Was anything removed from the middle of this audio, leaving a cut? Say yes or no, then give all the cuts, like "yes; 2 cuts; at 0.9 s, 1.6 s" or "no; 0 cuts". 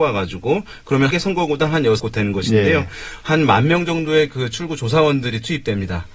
yes; 2 cuts; at 1.1 s, 2.0 s